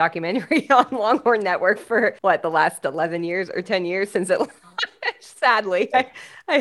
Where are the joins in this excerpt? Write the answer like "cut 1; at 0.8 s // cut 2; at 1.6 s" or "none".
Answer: cut 1; at 2.2 s